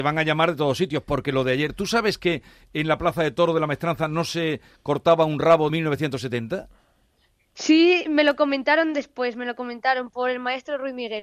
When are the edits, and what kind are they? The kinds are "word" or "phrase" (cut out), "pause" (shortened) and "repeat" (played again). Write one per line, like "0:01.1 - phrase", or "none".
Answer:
0:05.7 - phrase